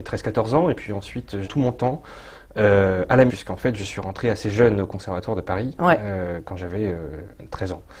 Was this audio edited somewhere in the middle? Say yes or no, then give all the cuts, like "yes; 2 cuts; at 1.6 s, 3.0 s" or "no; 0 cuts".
yes; 2 cuts; at 1.4 s, 3.3 s